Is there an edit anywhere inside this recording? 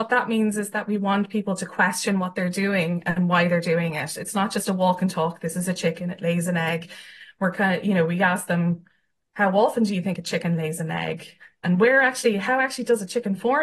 no; 0 cuts

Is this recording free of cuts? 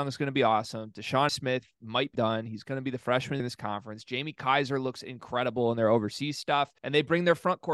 no; 4 cuts; at 1.3 s, 2.1 s, 3.4 s, 6.8 s

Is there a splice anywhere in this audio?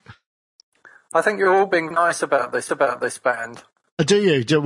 yes; 2 cuts; at 1.9 s, 2.7 s

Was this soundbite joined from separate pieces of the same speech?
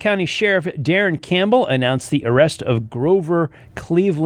no; 0 cuts

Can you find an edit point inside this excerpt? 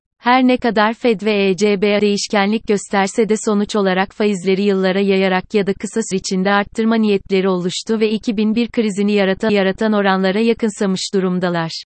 yes; 3 cuts; at 2.0 s, 6.1 s, 9.5 s

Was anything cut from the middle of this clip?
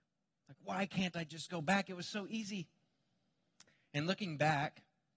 no; 0 cuts

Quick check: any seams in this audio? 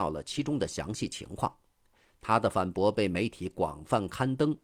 no; 0 cuts

